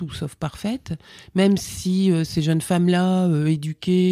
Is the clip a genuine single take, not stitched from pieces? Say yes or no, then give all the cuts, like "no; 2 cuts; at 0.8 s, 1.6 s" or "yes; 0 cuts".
yes; 0 cuts